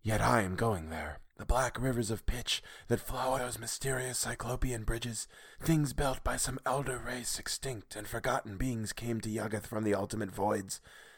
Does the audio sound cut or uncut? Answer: cut